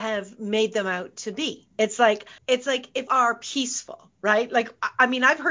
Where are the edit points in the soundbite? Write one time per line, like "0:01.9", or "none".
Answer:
0:01.7
0:02.4
0:03.1